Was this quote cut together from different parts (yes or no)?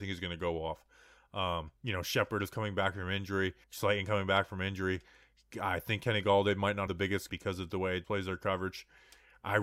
yes